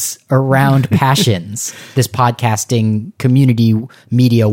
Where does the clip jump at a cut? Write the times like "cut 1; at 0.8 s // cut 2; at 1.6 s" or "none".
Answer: none